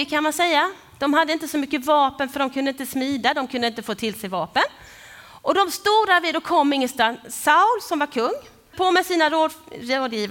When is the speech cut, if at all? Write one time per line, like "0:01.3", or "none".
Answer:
0:08.7